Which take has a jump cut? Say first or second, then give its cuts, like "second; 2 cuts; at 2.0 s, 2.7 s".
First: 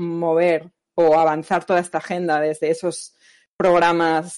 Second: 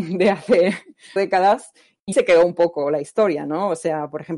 second; 2 cuts; at 1.2 s, 2.1 s